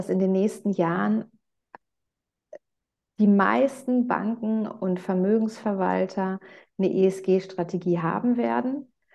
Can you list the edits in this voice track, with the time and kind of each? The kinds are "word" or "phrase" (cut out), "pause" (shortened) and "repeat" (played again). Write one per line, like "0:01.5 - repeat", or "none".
none